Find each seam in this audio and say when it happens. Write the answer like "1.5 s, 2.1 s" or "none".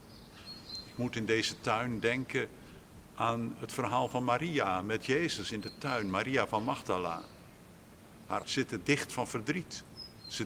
8.4 s